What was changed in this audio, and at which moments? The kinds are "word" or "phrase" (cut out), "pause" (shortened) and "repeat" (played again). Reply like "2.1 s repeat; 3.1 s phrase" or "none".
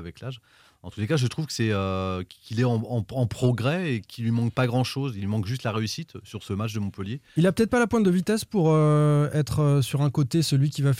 none